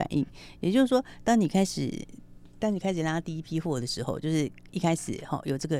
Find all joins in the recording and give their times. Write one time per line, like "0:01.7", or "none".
none